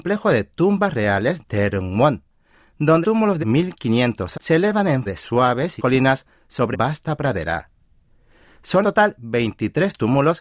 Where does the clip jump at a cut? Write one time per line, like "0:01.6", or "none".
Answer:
0:01.4
0:03.0
0:03.4
0:04.3
0:05.1
0:05.8
0:06.7
0:08.8